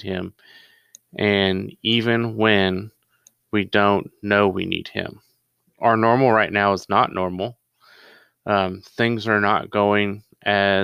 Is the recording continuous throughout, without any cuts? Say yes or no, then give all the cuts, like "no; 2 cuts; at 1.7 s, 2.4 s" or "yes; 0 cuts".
yes; 0 cuts